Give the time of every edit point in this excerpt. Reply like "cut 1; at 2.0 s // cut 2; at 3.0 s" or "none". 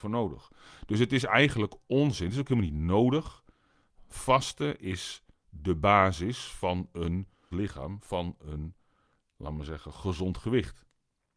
cut 1; at 7.5 s